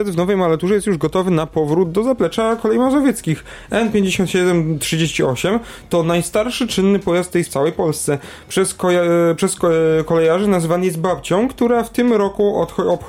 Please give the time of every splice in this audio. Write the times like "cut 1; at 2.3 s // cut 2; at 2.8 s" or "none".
cut 1; at 7.5 s